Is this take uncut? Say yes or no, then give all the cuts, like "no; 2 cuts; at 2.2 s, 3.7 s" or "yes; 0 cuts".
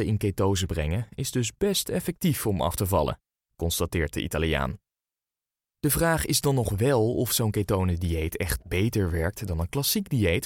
yes; 0 cuts